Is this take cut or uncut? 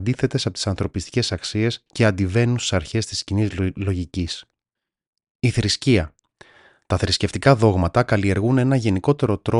uncut